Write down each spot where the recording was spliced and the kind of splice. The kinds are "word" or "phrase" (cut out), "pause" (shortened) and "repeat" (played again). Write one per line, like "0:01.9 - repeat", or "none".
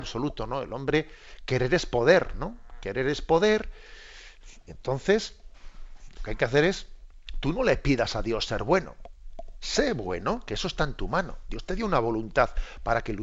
none